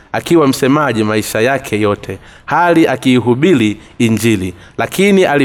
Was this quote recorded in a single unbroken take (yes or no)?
yes